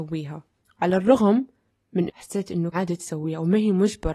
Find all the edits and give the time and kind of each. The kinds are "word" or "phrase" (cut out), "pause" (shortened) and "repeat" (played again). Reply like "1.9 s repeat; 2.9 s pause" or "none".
2.1 s word; 2.7 s word